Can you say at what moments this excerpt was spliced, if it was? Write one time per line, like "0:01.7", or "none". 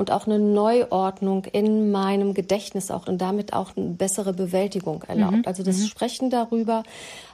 0:03.0
0:03.7